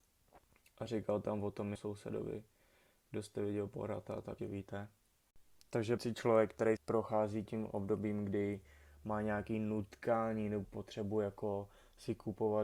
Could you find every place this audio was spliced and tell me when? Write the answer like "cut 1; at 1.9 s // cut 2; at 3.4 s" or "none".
cut 1; at 1.8 s // cut 2; at 4.4 s // cut 3; at 6.0 s // cut 4; at 6.8 s // cut 5; at 7.5 s // cut 6; at 10.6 s

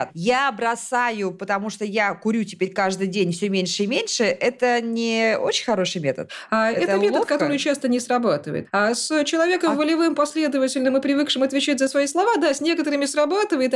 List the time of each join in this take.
none

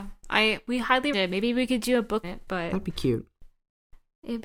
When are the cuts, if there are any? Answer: cut 1; at 1.1 s // cut 2; at 2.2 s

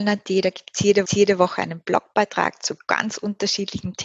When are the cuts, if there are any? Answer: cut 1; at 1.1 s

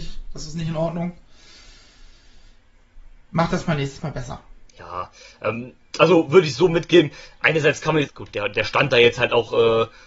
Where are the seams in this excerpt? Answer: cut 1; at 4.7 s // cut 2; at 8.1 s

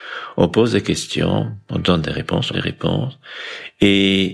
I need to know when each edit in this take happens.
cut 1; at 2.5 s

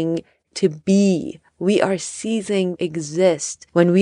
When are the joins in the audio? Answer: cut 1; at 2.8 s

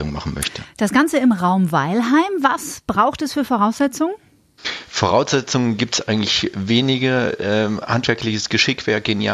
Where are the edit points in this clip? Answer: none

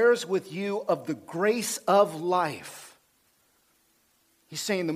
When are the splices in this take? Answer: none

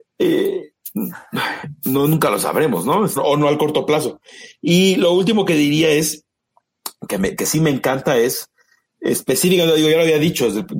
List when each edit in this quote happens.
cut 1; at 3.2 s

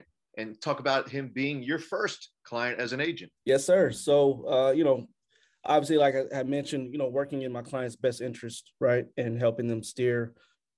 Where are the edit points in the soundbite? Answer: cut 1; at 3.4 s

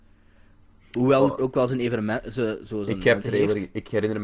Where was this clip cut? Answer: cut 1; at 1.4 s // cut 2; at 3.2 s

